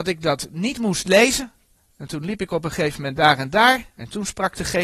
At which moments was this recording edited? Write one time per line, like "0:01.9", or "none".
none